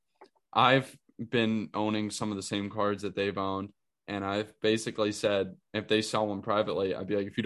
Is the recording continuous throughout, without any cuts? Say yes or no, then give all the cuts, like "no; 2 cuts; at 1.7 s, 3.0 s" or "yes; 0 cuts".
yes; 0 cuts